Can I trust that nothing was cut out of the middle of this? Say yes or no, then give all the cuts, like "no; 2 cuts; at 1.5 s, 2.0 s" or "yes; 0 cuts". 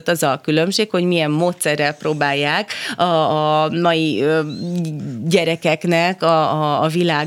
yes; 0 cuts